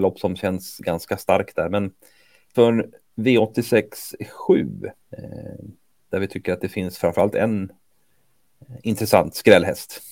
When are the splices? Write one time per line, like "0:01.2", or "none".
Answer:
0:02.5
0:05.0

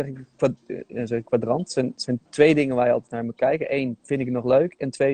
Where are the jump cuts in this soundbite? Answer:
0:02.3
0:04.0

